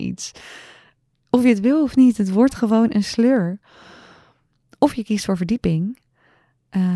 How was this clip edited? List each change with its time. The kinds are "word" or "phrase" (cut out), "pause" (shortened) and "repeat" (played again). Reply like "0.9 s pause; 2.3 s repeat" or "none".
none